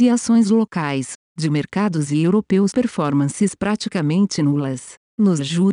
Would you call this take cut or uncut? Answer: cut